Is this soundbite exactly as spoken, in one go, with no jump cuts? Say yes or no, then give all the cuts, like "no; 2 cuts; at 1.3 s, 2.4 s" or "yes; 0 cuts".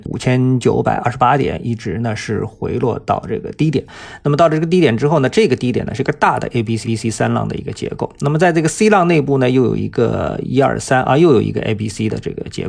no; 1 cut; at 6.8 s